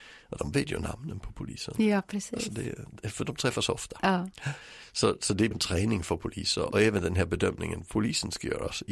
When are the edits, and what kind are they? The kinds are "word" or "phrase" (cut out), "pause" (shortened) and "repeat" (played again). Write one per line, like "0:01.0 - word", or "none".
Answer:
0:03.2 - word
0:05.5 - word
0:06.7 - word